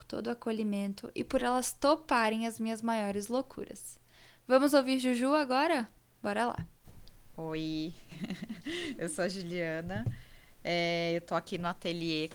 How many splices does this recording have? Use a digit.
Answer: 0